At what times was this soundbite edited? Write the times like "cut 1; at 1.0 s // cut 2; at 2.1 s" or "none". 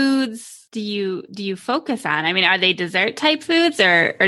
none